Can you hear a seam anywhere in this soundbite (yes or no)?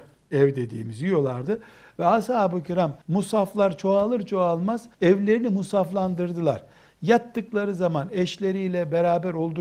yes